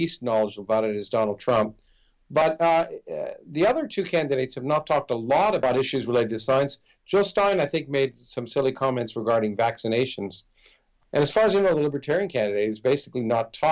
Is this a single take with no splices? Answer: yes; 0 cuts

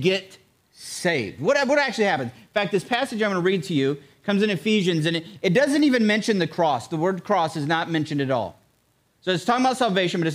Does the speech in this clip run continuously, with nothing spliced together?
yes; 0 cuts

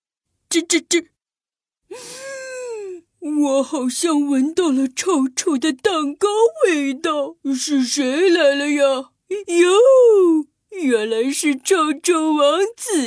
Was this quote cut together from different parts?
yes; 3 cuts; at 3.1 s, 7.4 s, 9.2 s

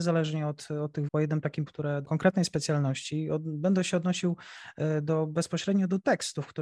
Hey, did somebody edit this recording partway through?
yes; 3 cuts; at 1.1 s, 1.7 s, 2.0 s

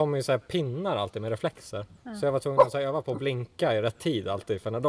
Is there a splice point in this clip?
yes; 1 cut; at 2.0 s

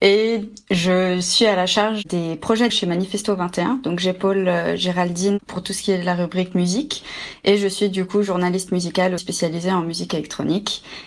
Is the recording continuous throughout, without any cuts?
no; 2 cuts; at 2.7 s, 9.2 s

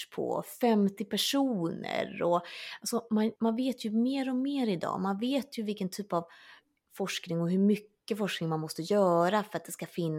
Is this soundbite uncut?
no; 1 cut; at 3.4 s

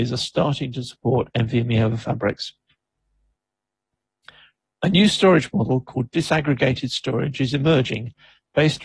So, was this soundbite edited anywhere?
no; 0 cuts

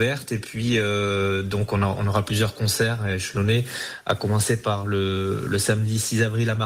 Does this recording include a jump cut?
no; 0 cuts

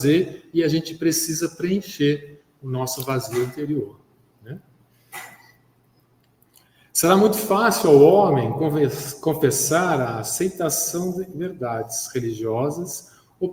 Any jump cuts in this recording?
no; 0 cuts

